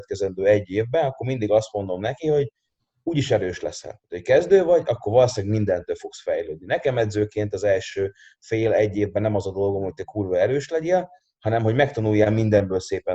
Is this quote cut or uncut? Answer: uncut